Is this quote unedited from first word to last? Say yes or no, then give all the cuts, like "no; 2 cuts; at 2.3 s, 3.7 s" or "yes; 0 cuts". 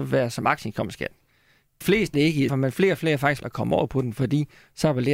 no; 4 cuts; at 1.8 s, 2.1 s, 2.5 s, 3.4 s